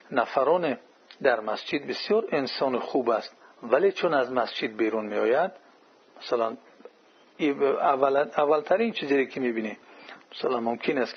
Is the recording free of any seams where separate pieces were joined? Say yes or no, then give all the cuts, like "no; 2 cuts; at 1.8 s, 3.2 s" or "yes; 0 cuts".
yes; 0 cuts